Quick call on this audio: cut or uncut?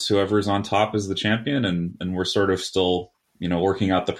uncut